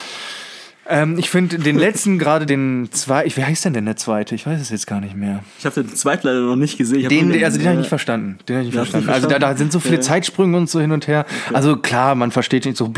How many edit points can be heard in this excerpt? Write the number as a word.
two